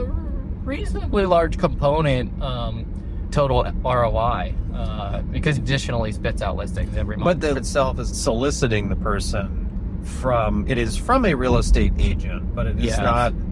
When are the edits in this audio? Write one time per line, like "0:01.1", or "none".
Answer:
0:03.3
0:05.5
0:07.5
0:08.1